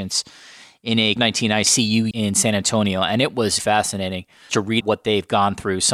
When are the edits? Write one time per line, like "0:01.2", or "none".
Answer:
0:01.2
0:02.1
0:03.6
0:04.5
0:04.8